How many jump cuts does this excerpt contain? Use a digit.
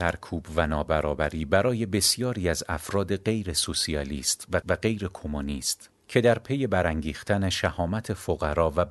1